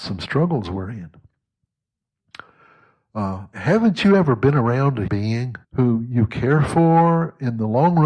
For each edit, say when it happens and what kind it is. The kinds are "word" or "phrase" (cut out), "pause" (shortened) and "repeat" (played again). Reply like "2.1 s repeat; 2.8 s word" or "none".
5.1 s word; 5.6 s pause